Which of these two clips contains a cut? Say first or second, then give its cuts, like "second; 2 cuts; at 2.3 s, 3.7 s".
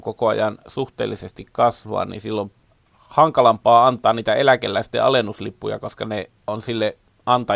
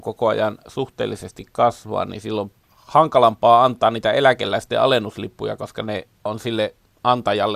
second; 1 cut; at 2.6 s